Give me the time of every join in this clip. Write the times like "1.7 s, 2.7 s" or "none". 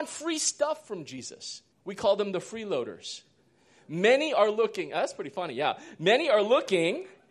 1.7 s